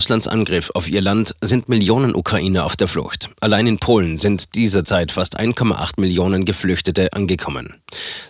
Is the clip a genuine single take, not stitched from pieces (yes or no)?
yes